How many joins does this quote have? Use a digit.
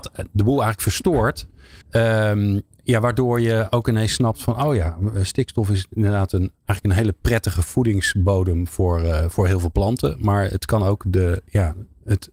2